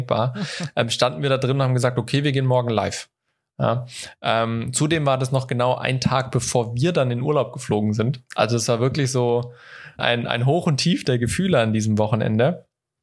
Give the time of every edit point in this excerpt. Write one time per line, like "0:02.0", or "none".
0:10.0